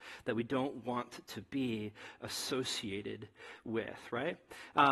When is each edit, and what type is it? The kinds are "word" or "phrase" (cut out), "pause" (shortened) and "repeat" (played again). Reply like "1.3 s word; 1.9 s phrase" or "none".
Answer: none